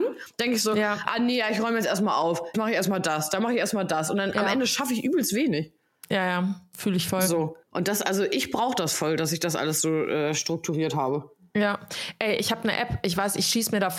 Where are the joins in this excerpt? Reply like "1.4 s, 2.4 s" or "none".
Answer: 2.5 s, 7.6 s